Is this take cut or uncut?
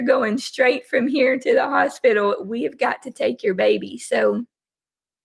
uncut